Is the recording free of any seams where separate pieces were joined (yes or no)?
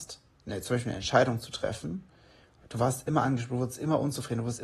yes